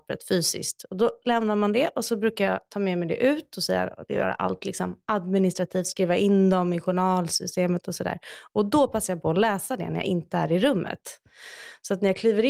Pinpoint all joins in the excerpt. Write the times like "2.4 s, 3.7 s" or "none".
none